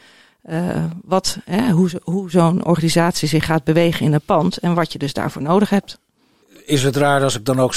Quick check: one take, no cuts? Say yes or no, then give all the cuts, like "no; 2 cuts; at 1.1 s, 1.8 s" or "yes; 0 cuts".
yes; 0 cuts